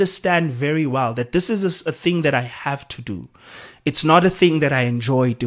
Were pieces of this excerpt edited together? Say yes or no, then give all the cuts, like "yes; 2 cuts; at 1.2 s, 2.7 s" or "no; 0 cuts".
no; 0 cuts